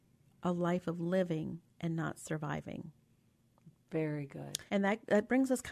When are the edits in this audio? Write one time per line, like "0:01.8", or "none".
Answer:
0:04.7